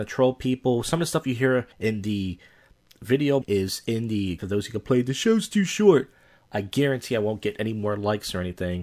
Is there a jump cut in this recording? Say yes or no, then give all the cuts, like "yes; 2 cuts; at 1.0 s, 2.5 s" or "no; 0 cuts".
yes; 3 cuts; at 1.7 s, 3.4 s, 4.4 s